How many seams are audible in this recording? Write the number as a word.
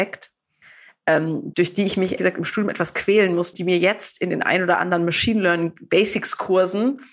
three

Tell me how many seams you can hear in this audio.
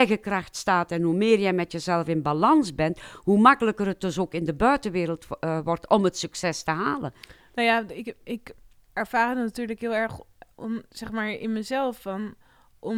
zero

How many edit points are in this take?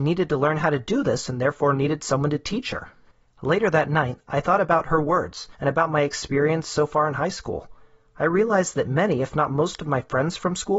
one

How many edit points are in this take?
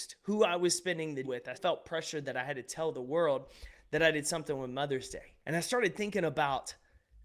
three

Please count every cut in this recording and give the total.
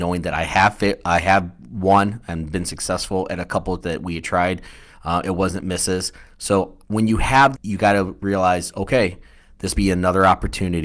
four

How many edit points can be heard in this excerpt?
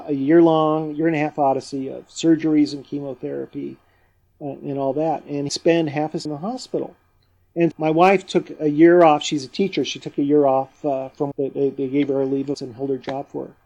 five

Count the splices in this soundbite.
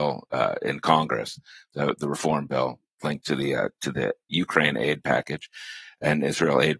zero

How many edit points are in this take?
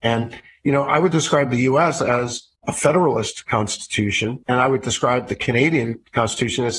two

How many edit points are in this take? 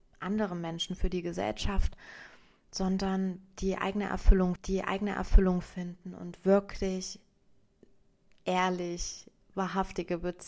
one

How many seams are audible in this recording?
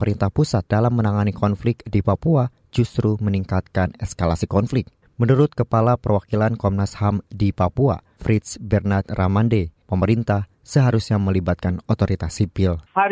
zero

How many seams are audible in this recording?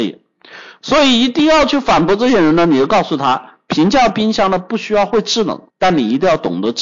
one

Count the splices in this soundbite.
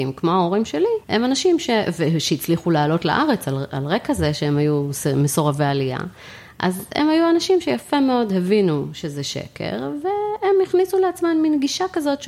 one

